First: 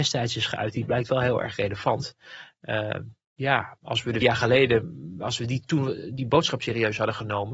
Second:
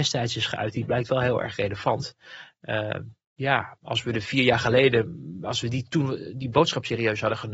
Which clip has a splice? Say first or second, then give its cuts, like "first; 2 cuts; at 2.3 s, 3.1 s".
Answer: first; 1 cut; at 4.2 s